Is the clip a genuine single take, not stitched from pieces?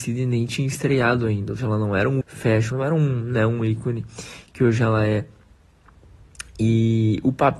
no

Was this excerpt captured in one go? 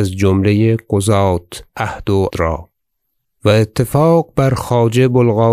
no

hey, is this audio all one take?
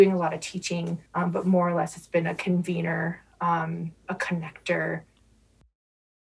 no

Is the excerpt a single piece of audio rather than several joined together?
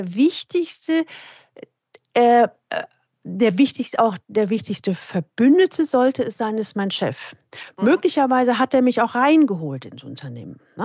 yes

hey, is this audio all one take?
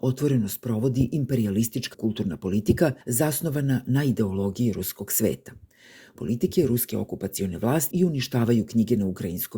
no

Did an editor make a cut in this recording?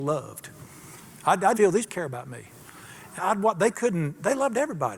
yes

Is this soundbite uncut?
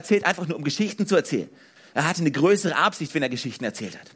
yes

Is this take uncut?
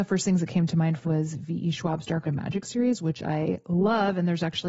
no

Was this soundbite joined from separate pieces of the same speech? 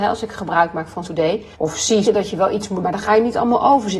yes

